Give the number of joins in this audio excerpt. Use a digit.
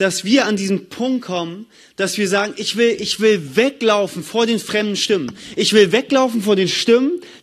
0